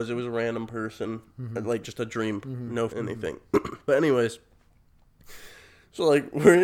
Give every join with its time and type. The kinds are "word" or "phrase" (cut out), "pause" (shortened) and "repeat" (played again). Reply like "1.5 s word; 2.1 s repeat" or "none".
1.8 s phrase; 2.4 s word; 2.9 s word